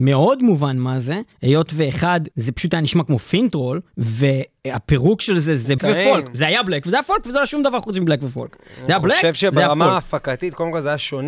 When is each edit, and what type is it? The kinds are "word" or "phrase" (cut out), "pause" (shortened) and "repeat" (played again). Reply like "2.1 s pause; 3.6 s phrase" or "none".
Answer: 1.3 s pause; 2.3 s pause; 3.9 s pause; 5.8 s word